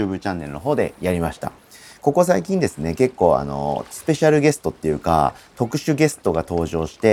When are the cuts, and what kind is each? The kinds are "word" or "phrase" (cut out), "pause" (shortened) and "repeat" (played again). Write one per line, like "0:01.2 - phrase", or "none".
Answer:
none